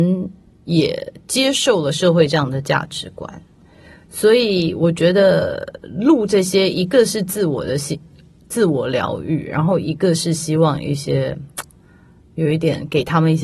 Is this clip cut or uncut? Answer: uncut